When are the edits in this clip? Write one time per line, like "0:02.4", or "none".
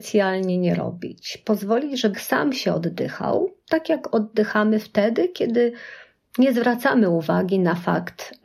0:02.1